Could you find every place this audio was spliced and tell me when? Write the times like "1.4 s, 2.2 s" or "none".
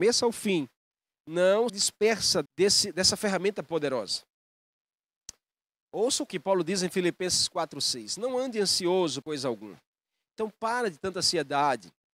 1.7 s, 2.5 s, 6.3 s, 9.2 s